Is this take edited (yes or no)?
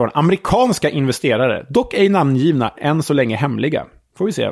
yes